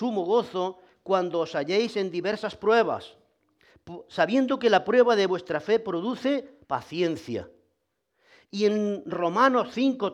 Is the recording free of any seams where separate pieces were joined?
no; 1 cut; at 6.6 s

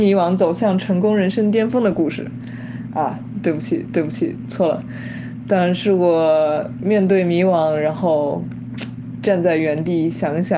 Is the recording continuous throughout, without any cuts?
no; 1 cut; at 3.9 s

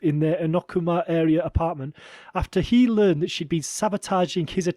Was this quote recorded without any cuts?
yes; 0 cuts

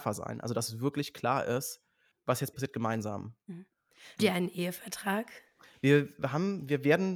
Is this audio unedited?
no; 3 cuts; at 2.1 s, 2.5 s, 4.2 s

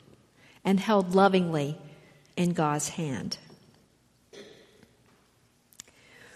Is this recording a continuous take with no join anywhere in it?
yes; 0 cuts

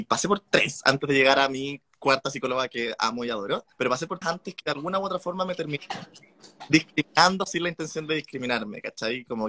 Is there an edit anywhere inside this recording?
yes; 2 cuts; at 3.7 s, 4.2 s

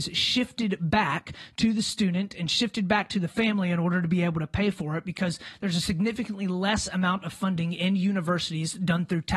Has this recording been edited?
no; 0 cuts

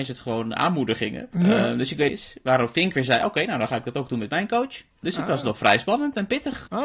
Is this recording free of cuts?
no; 1 cut; at 2.1 s

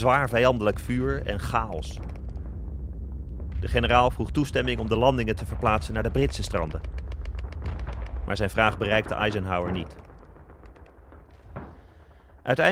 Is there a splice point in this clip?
no; 0 cuts

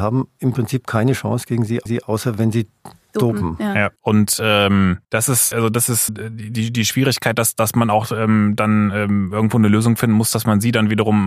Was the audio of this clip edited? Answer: yes; 5 cuts; at 1.9 s, 4.0 s, 5.0 s, 5.5 s, 6.1 s

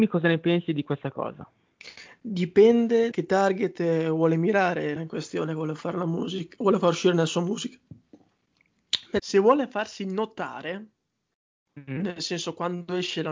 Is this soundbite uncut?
no; 3 cuts; at 3.1 s, 5.0 s, 9.2 s

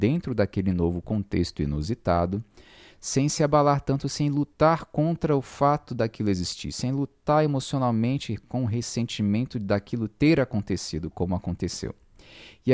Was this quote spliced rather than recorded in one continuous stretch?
no; 0 cuts

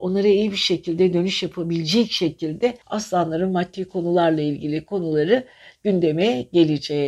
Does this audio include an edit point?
yes; 1 cut; at 2.8 s

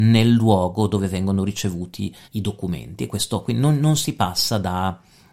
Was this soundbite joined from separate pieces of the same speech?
yes; 1 cut; at 2.2 s

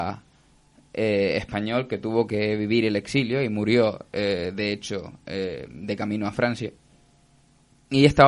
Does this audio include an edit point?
no; 0 cuts

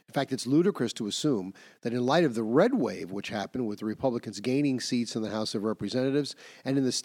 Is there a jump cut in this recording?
no; 0 cuts

